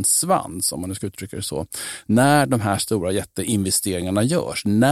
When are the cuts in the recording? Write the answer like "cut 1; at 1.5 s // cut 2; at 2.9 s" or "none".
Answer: none